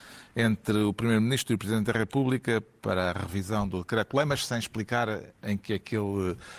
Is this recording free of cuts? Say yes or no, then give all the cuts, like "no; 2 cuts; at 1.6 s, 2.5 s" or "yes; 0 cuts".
yes; 0 cuts